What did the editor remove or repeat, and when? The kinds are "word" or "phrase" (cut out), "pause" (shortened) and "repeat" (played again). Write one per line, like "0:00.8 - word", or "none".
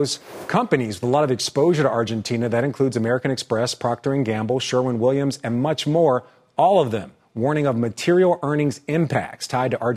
none